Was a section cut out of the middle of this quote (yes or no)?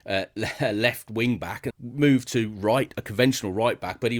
yes